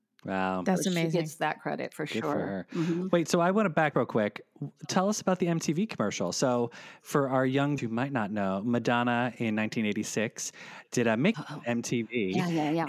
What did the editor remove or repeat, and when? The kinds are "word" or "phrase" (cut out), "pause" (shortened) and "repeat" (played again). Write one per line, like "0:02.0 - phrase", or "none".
0:03.9 - word
0:07.8 - word
0:11.3 - phrase